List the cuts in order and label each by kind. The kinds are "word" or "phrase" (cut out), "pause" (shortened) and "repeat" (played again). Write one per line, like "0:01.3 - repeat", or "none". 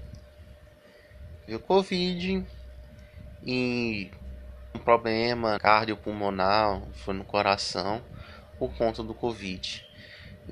0:01.5 - phrase
0:04.7 - word
0:05.6 - word